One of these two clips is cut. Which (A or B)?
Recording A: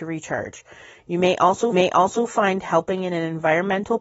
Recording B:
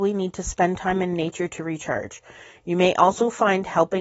A